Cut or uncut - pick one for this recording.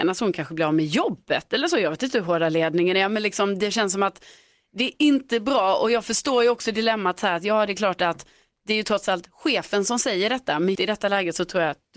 cut